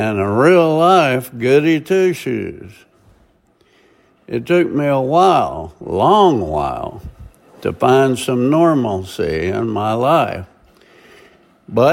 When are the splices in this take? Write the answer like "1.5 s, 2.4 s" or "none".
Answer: none